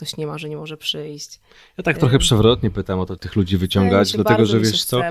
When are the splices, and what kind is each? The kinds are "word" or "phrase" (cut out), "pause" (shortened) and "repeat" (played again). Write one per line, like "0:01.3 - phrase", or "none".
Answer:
0:03.2 - phrase